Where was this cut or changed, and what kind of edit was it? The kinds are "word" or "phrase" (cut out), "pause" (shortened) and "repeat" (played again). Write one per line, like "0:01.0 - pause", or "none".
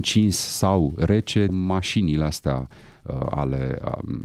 0:01.5 - word